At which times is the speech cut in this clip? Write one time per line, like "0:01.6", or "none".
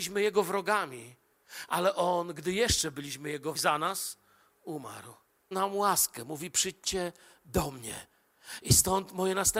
0:03.6
0:05.5